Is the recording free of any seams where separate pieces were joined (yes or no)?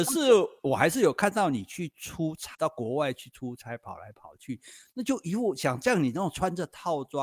no